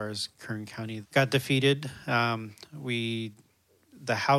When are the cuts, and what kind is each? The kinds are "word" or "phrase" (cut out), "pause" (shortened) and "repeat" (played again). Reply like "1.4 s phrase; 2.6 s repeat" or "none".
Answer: 1.0 s word